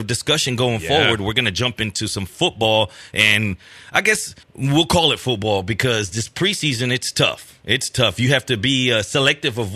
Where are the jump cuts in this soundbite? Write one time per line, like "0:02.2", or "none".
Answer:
0:04.4